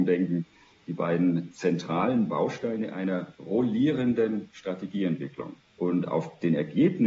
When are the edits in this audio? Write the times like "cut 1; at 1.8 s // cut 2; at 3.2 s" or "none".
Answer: cut 1; at 3.3 s // cut 2; at 5.7 s